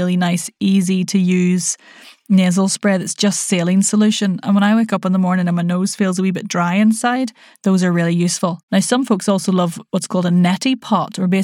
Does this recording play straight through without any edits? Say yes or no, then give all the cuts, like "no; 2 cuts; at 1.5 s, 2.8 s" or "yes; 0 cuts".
yes; 0 cuts